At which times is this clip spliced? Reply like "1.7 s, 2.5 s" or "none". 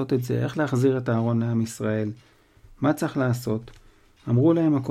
none

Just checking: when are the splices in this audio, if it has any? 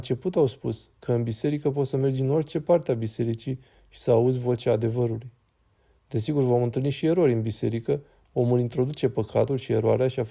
none

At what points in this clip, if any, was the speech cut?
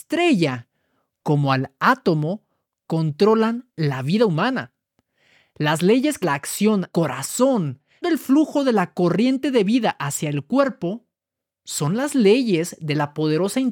6.2 s, 6.9 s, 8.0 s

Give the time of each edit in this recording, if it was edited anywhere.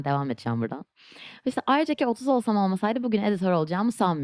2.0 s

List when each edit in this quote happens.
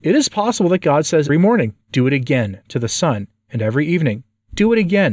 1.3 s

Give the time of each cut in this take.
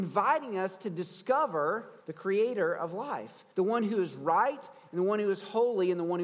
2.0 s, 3.5 s

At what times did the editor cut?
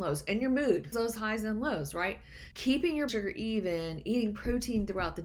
0.9 s, 2.5 s, 3.1 s

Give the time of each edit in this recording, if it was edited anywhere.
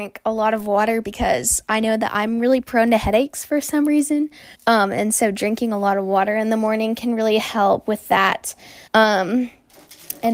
4.5 s, 8.9 s

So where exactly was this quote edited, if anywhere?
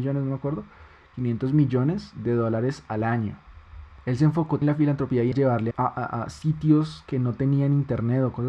4.6 s, 5.3 s, 5.7 s

